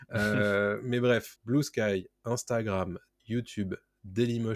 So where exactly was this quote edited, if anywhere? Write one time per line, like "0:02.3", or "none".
0:01.4
0:03.2